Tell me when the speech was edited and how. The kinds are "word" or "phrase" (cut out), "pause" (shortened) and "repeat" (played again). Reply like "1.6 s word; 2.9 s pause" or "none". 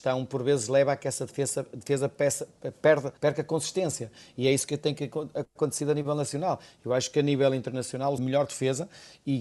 3.2 s pause; 8.2 s phrase